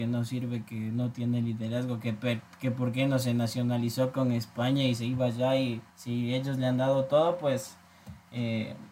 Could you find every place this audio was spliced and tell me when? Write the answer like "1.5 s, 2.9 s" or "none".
5.9 s